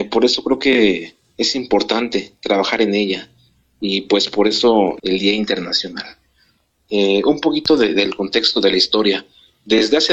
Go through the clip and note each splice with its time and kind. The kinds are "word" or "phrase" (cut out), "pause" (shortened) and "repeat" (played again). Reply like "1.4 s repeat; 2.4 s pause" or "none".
5.0 s phrase